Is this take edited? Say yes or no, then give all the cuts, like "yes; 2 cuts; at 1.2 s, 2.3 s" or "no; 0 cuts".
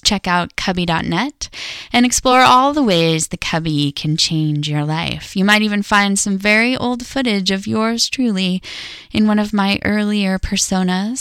no; 0 cuts